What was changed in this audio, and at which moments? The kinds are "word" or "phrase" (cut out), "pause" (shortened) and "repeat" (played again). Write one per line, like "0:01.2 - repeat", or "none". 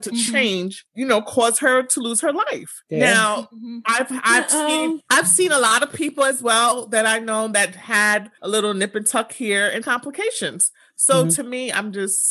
0:09.8 - phrase

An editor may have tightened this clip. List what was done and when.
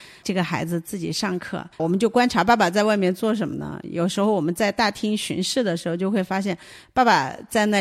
0:01.7 - pause

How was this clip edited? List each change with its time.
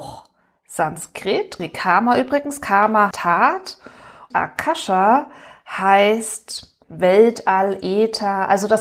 0:01.6 - word
0:03.1 - word
0:04.3 - word
0:06.8 - word

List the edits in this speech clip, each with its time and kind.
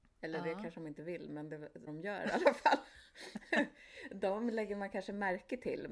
0:01.9 - word

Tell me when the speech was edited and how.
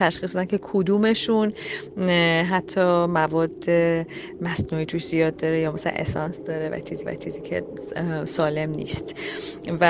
0:07.1 - repeat

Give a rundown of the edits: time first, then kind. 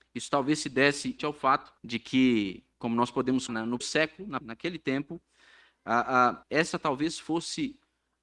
0:01.2 - word
0:01.8 - pause
0:02.7 - pause
0:03.5 - word
0:03.8 - word
0:04.4 - word
0:06.4 - pause

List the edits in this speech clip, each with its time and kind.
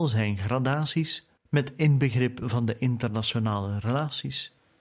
0:01.4 - pause

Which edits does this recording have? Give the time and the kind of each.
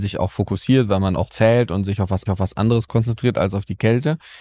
0:01.3 - word
0:02.3 - repeat

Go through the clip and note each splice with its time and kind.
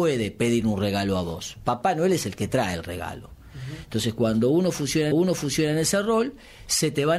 0:05.1 - repeat

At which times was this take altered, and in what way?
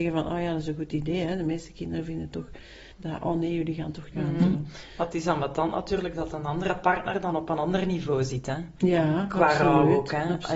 0:02.9 - pause
0:04.1 - phrase

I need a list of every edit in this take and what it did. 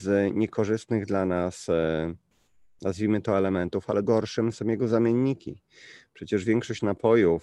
0:04.0 - word
0:04.5 - word

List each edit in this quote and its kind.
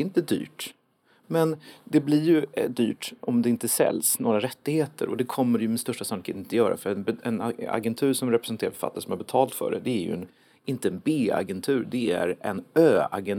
none

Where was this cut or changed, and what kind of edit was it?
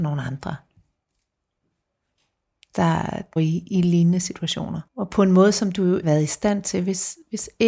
0:03.4 - phrase
0:04.9 - pause
0:06.0 - phrase

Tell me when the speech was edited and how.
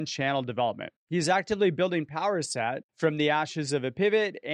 0:01.0 - pause

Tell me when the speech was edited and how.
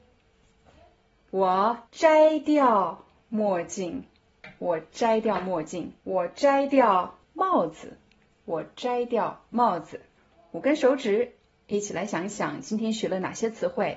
0:01.9 - pause
0:06.0 - pause
0:07.2 - pause
0:09.5 - pause
0:10.2 - pause

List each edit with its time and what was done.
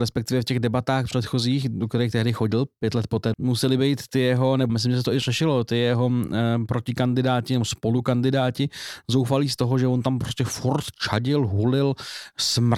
0:03.3 - phrase
0:04.7 - phrase

